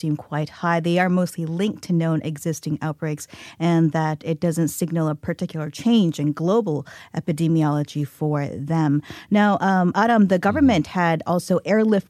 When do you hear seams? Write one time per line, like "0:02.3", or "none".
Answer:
none